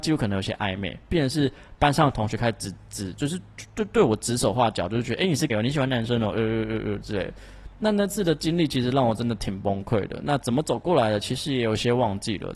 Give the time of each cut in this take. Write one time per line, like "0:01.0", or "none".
0:05.5